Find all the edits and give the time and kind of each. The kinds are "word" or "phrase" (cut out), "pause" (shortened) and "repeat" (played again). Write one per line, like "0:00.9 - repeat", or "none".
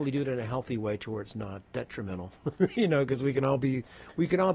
none